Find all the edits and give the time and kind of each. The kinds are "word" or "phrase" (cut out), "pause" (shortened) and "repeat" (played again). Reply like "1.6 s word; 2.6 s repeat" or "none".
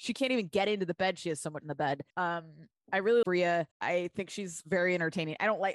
1.6 s word; 2.1 s pause; 3.2 s word; 3.7 s pause